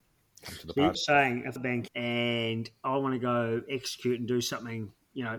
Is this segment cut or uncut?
cut